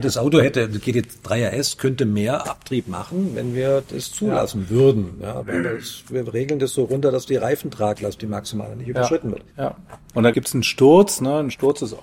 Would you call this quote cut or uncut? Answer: cut